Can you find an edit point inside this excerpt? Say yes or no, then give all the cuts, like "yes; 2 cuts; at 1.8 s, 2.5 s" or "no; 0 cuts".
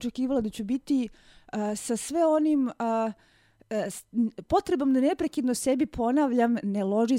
no; 0 cuts